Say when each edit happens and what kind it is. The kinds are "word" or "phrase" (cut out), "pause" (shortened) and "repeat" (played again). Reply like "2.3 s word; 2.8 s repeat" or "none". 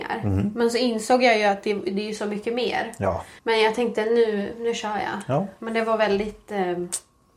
3.4 s pause